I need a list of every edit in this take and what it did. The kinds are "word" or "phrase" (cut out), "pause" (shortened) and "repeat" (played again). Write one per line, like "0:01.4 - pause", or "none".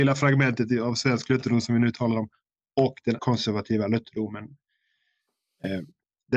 0:03.2 - phrase